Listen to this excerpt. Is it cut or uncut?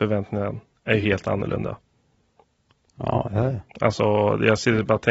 uncut